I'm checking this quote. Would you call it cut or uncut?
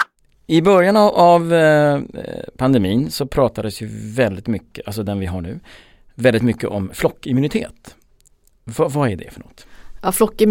uncut